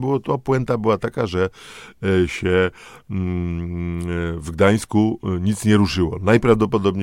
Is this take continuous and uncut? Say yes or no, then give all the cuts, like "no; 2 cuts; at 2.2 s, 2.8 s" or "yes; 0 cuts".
yes; 0 cuts